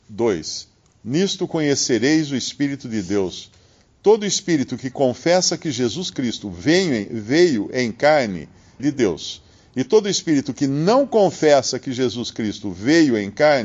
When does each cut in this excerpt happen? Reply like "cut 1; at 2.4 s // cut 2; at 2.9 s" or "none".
cut 1; at 8.8 s